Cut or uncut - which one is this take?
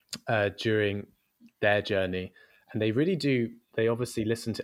uncut